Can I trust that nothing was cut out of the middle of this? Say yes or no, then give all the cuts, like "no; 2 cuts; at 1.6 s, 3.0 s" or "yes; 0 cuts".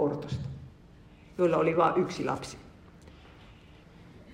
yes; 0 cuts